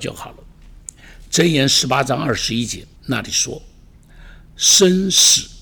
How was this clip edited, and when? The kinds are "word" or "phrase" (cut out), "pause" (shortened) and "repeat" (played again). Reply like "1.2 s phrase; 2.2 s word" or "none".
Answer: 3.0 s pause